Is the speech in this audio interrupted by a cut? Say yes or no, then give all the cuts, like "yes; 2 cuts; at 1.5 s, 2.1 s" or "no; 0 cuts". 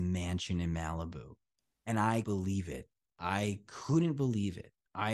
yes; 1 cut; at 2.2 s